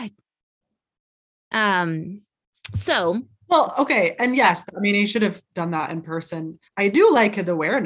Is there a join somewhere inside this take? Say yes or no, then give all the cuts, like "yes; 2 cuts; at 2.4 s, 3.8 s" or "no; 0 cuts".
yes; 1 cut; at 6.7 s